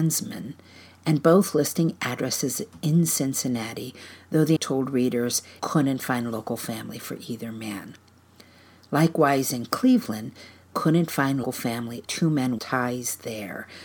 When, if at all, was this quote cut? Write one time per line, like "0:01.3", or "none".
0:04.6
0:05.6
0:10.7
0:11.4
0:12.1
0:12.6